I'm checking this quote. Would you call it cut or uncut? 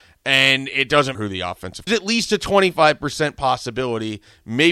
cut